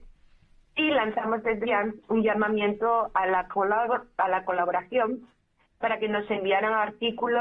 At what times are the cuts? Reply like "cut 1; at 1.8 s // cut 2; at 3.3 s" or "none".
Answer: cut 1; at 1.6 s